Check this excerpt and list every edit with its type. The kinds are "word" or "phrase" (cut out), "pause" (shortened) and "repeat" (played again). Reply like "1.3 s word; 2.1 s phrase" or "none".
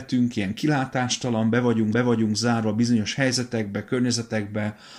1.9 s repeat